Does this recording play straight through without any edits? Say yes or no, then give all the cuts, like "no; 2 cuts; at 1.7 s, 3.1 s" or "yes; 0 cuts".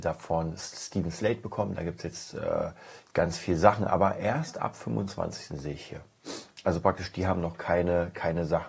no; 1 cut; at 3.0 s